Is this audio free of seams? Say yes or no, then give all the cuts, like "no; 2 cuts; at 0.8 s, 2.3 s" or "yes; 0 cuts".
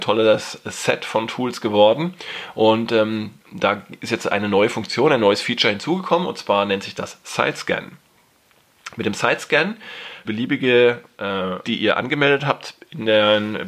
no; 3 cuts; at 3.4 s, 10.2 s, 11.6 s